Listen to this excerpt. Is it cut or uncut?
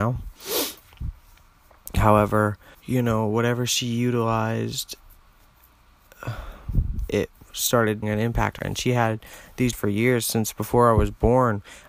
cut